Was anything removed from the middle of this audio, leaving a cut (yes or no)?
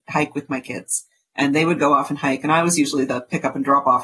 no